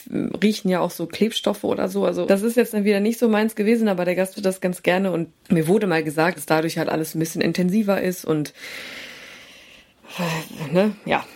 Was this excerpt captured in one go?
no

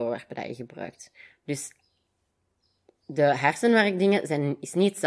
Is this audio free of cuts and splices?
yes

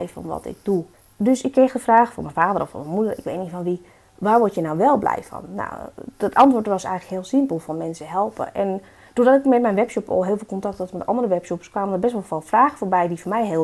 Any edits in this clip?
yes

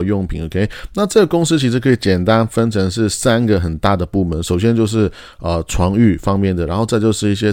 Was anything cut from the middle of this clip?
no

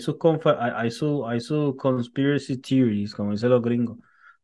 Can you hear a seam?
no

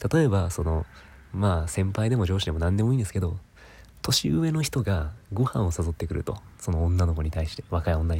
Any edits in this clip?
yes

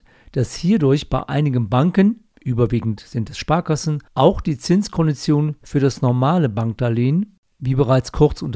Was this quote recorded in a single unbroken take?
no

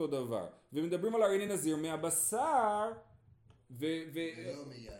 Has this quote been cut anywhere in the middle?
no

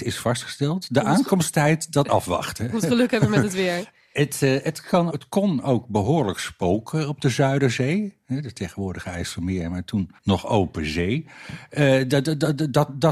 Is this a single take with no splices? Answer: no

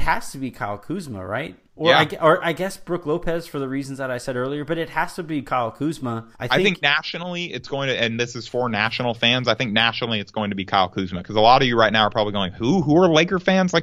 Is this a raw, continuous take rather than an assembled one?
no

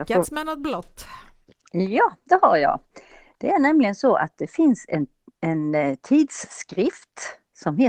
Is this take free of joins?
yes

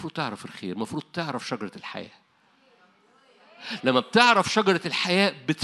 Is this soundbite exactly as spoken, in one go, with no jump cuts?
yes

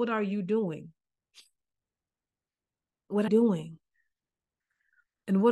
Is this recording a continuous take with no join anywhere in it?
no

